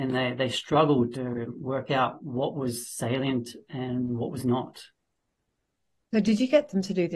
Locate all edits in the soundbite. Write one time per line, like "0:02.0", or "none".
0:01.1